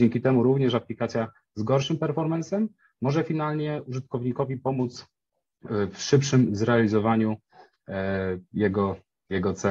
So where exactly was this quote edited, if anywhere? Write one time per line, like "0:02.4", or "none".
none

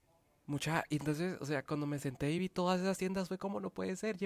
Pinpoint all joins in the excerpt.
none

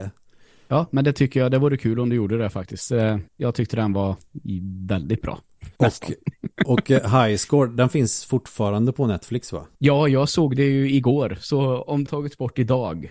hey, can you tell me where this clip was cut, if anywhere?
0:03.3
0:05.8
0:09.7
0:12.1

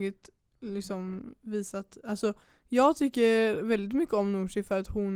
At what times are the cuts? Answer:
none

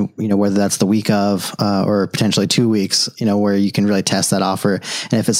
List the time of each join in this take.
none

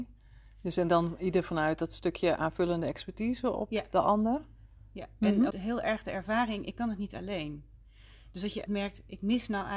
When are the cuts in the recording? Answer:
0:05.5
0:08.7

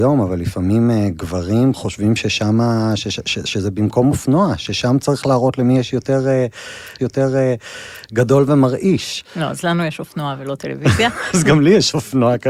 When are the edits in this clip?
0:07.0

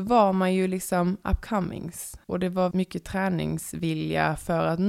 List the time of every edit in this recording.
0:02.2
0:02.7

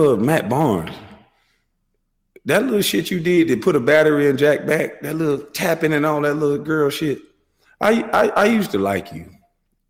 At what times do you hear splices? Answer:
none

